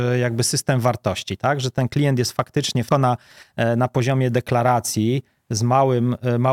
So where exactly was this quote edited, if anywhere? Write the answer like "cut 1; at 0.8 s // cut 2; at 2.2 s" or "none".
cut 1; at 2.9 s